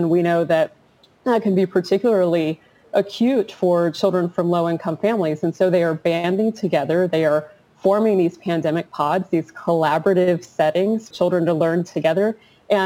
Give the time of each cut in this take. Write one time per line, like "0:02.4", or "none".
0:11.1